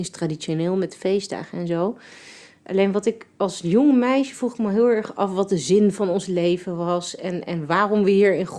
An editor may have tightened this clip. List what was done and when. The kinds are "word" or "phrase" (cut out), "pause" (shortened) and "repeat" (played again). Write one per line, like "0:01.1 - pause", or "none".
none